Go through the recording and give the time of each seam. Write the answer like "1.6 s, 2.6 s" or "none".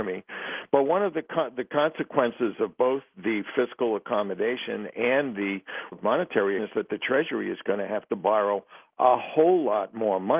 5.9 s, 6.6 s